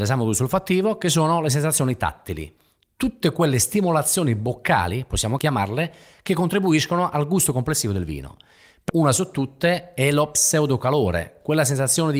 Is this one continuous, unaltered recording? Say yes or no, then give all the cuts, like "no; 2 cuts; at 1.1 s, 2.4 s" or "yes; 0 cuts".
no; 1 cut; at 8.9 s